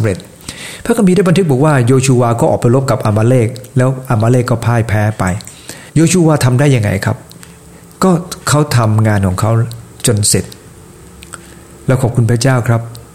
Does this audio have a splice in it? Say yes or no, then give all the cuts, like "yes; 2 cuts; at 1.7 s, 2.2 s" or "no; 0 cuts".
yes; 1 cut; at 5.9 s